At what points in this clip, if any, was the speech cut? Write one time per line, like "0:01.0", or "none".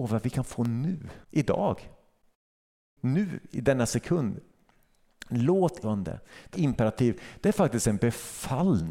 0:01.2
0:05.8
0:06.5